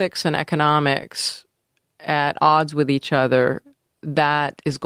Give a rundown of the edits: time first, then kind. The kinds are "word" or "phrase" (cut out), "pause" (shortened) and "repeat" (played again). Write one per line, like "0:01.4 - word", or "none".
none